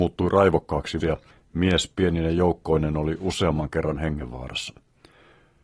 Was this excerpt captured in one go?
no; 1 cut; at 1.0 s

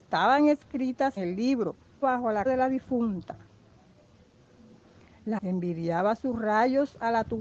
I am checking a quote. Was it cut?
yes; 4 cuts; at 1.2 s, 2.0 s, 2.5 s, 5.4 s

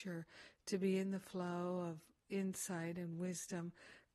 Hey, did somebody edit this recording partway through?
no; 0 cuts

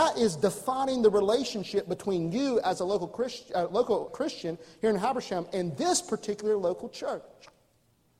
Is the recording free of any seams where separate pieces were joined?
no; 1 cut; at 4.1 s

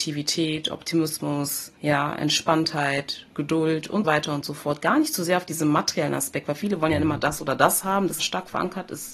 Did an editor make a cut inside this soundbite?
yes; 3 cuts; at 1.8 s, 4.0 s, 8.2 s

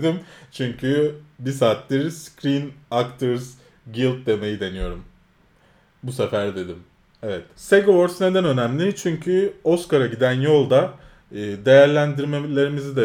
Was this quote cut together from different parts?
no; 0 cuts

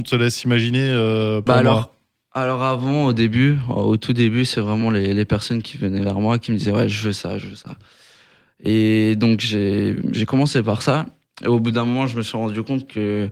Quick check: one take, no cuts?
yes; 0 cuts

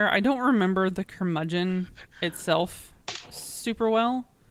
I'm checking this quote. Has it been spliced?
yes; 1 cut; at 2.1 s

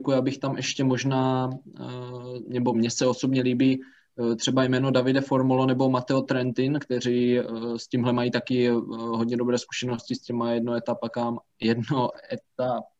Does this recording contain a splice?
no; 0 cuts

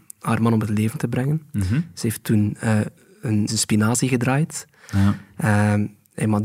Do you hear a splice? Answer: yes; 1 cut; at 3.5 s

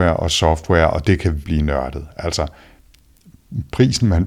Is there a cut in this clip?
yes; 1 cut; at 1.4 s

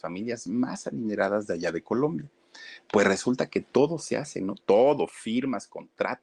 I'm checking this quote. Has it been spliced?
no; 0 cuts

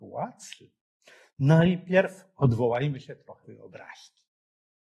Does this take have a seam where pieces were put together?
yes; 1 cut; at 3.4 s

